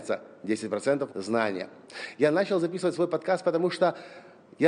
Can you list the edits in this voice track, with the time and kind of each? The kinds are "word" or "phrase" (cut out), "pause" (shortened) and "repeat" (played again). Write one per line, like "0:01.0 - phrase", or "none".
0:01.1 - phrase